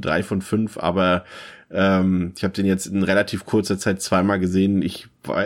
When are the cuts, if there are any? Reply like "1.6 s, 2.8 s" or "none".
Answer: none